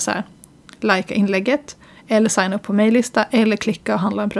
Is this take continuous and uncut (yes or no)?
yes